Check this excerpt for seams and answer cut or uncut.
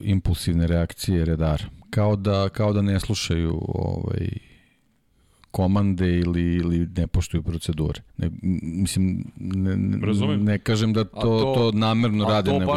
cut